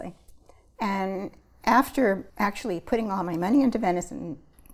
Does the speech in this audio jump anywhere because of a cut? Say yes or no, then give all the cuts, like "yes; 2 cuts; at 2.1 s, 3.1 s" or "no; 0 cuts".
yes; 1 cut; at 2.3 s